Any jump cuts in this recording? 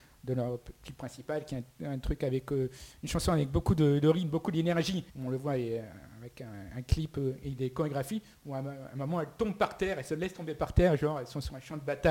yes; 1 cut; at 5.1 s

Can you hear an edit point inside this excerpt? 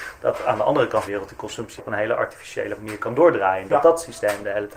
yes; 2 cuts; at 1.1 s, 1.8 s

